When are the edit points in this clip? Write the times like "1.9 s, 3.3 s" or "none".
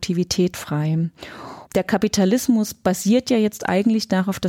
1.7 s